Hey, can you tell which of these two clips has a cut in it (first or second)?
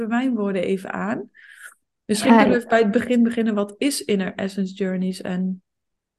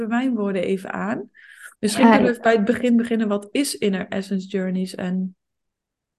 second